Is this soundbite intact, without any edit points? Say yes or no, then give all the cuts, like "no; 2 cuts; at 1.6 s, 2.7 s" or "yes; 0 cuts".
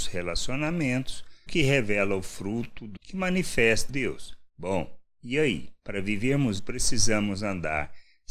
no; 6 cuts; at 1.5 s, 3.0 s, 3.9 s, 4.5 s, 5.8 s, 6.6 s